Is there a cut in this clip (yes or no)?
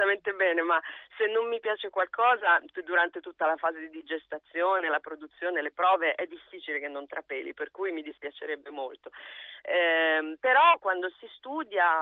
no